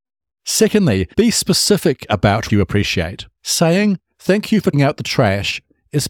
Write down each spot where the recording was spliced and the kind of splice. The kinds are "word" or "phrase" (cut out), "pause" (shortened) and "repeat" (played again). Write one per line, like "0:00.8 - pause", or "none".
0:01.1 - pause
0:02.5 - word
0:03.3 - pause
0:04.7 - word

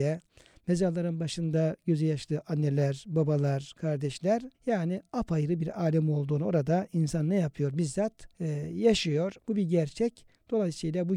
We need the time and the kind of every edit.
0:04.5 - pause
0:08.3 - pause
0:09.4 - pause

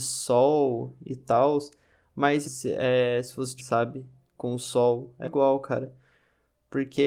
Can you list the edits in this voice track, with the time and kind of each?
0:02.4 - word
0:03.6 - word
0:05.2 - word

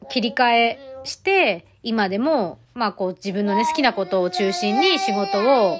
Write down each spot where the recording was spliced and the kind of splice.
0:02.6 - pause

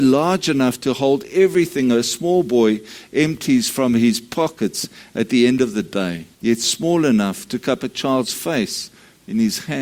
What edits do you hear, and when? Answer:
0:06.3 - pause

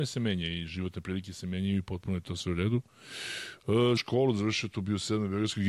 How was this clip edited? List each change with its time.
0:04.0 - word

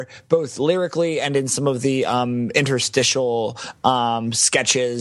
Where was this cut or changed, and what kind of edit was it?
none

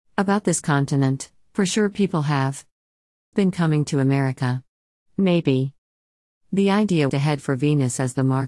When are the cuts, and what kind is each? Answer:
0:03.3 - word
0:07.1 - word

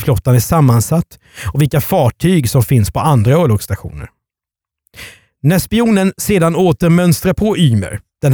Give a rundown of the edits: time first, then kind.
none

